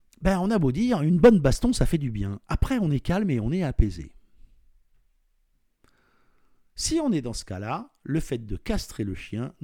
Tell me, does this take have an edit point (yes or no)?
no